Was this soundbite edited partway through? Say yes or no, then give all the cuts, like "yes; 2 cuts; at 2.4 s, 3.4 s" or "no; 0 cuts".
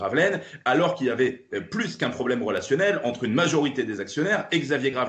no; 0 cuts